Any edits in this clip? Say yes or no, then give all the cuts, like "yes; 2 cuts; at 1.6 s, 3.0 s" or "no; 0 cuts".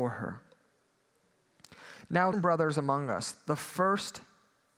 yes; 1 cut; at 2.3 s